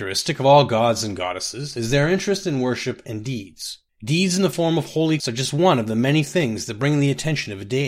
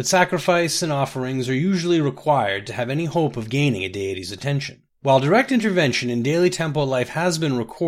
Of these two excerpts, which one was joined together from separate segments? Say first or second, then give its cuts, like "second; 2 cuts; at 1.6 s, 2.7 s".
first; 1 cut; at 5.2 s